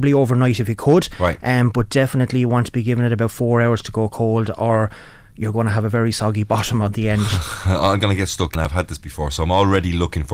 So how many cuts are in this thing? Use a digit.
0